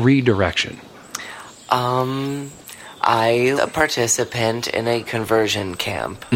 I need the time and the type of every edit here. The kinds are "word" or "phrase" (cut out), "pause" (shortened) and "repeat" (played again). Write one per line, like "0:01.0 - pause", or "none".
0:03.6 - word
0:05.0 - word